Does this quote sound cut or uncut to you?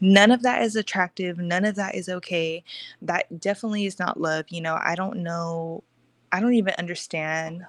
uncut